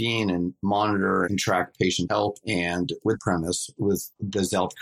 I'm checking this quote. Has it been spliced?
yes; 2 cuts; at 2.1 s, 3.2 s

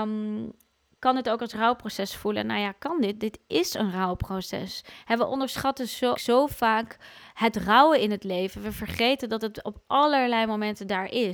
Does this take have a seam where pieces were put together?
yes; 1 cut; at 6.1 s

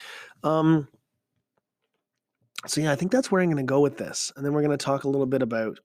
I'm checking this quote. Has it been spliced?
no; 0 cuts

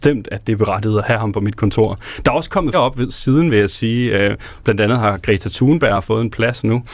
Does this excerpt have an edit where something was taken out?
yes; 1 cut; at 2.7 s

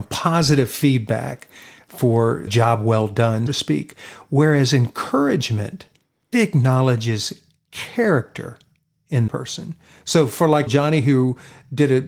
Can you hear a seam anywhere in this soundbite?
yes; 5 cuts; at 2.5 s, 3.5 s, 6.3 s, 9.3 s, 10.7 s

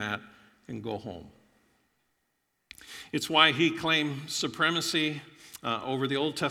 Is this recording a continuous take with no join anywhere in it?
yes; 0 cuts

